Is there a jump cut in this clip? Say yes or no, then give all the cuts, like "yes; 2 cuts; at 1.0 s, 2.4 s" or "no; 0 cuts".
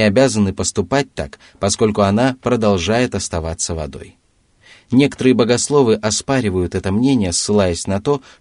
no; 0 cuts